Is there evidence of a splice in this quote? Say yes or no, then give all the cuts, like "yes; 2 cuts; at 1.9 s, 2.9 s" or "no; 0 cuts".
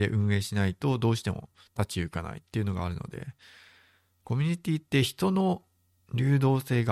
no; 0 cuts